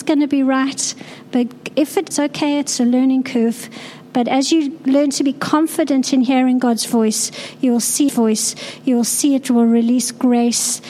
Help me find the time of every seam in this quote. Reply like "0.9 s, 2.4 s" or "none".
1.7 s, 2.1 s, 8.1 s